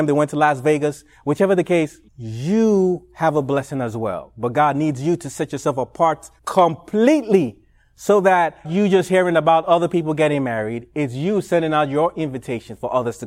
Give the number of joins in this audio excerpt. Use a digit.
3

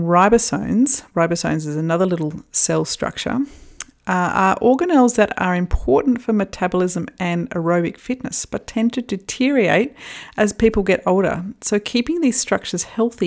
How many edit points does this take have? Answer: 0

